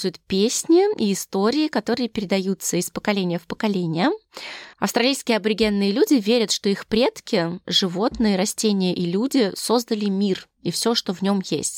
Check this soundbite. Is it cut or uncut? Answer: cut